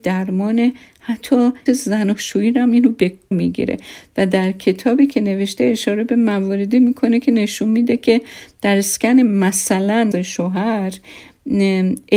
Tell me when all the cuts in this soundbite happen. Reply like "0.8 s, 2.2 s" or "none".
1.7 s, 3.3 s, 10.1 s